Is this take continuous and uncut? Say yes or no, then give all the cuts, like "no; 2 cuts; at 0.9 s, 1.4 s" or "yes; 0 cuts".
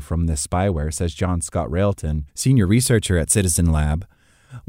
no; 1 cut; at 2.3 s